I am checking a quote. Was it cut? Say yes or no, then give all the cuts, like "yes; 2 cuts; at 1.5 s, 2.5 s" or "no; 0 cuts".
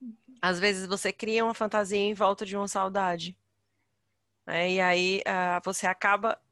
no; 0 cuts